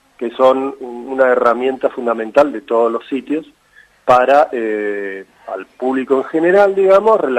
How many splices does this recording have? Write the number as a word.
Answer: zero